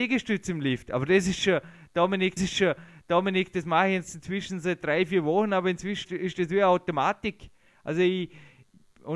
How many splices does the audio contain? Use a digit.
2